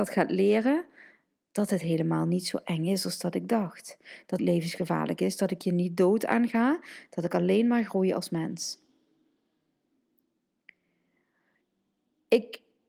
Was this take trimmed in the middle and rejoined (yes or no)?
yes